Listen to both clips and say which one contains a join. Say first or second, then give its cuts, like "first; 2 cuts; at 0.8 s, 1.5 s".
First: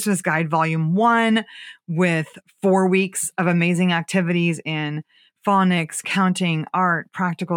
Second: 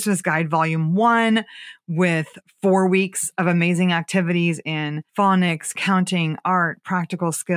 second; 1 cut; at 5.1 s